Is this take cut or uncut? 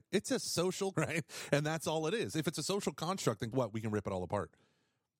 cut